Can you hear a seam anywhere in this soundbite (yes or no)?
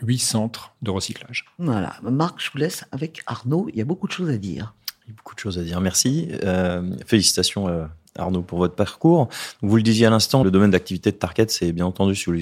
yes